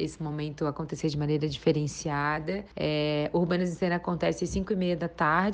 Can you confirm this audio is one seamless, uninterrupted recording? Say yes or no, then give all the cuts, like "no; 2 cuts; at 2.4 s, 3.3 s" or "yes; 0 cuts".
yes; 0 cuts